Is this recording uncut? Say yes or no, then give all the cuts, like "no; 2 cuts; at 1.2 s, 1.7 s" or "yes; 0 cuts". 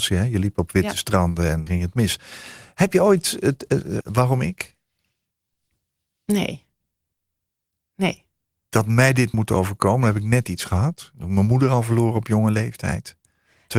no; 3 cuts; at 1.7 s, 4.0 s, 9.3 s